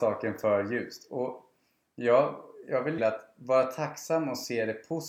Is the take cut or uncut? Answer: cut